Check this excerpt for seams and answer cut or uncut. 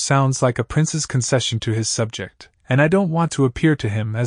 cut